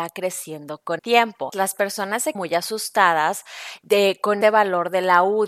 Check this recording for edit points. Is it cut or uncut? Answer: cut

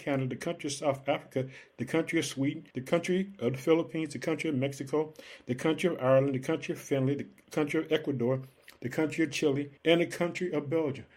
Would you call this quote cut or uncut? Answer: cut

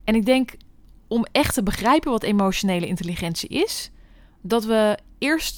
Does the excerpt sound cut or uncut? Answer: uncut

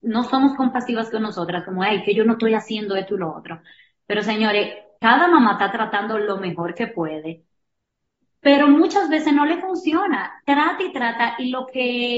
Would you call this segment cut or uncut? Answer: uncut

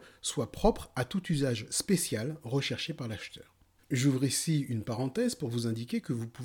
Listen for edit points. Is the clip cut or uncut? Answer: uncut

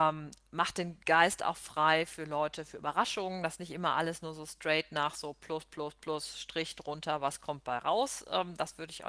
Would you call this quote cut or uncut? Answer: uncut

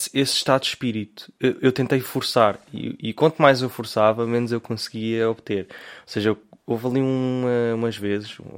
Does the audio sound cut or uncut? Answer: uncut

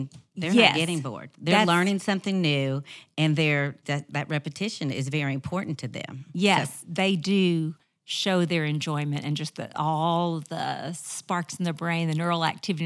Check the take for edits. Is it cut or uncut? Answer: uncut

